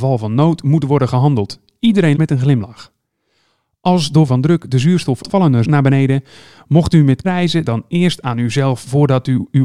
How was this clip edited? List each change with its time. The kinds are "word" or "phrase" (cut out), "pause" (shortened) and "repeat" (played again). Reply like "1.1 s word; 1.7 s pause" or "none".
2.2 s word; 4.3 s word; 5.2 s word; 5.6 s word; 7.2 s word; 7.6 s word

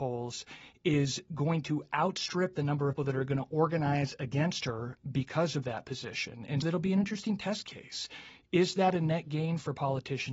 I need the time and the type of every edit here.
3.0 s word; 6.6 s word

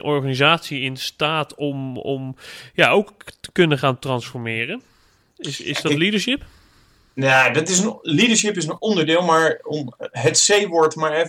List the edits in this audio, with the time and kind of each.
none

